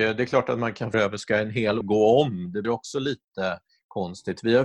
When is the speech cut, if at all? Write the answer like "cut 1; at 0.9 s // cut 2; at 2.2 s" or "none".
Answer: cut 1; at 0.9 s // cut 2; at 1.8 s // cut 3; at 2.6 s